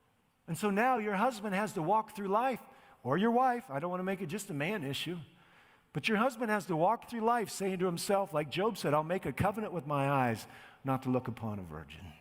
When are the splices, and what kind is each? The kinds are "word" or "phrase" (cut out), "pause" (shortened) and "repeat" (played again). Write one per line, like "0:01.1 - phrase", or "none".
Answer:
none